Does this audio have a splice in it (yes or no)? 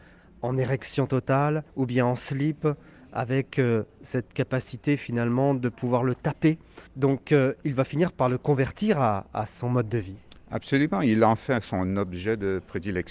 yes